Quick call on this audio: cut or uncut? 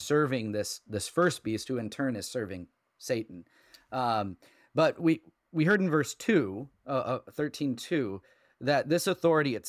uncut